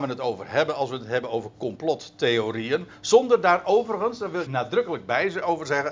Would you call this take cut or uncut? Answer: cut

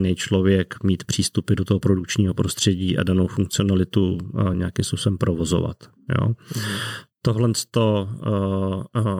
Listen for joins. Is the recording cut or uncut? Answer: uncut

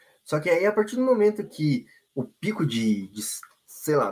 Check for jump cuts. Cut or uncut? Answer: uncut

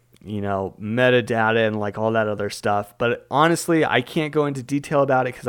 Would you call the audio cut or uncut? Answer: uncut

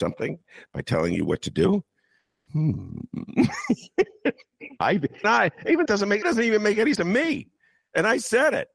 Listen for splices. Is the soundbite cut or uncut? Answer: cut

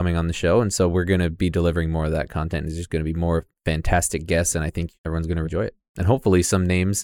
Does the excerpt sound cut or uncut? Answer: cut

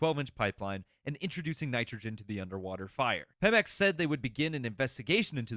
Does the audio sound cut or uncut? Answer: cut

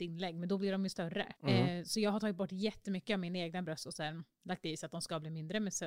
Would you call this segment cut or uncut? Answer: cut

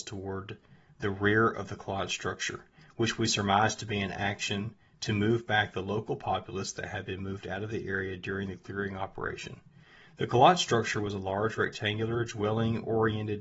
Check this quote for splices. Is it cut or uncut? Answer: uncut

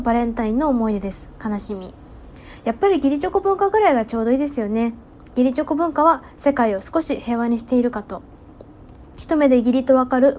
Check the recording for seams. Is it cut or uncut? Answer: uncut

